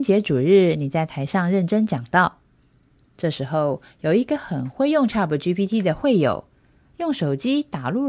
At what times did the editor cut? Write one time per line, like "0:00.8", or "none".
none